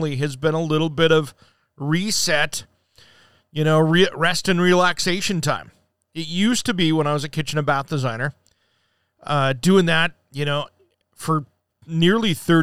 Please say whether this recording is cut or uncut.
uncut